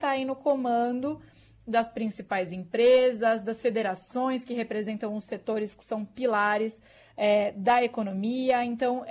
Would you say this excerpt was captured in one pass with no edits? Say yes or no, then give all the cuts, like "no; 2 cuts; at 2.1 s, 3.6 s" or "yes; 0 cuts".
yes; 0 cuts